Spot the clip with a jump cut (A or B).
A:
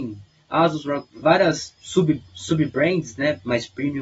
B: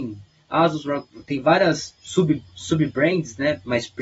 A